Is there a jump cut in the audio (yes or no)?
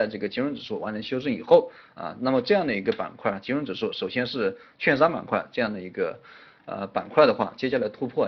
no